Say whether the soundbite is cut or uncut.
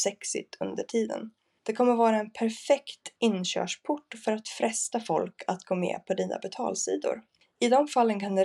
uncut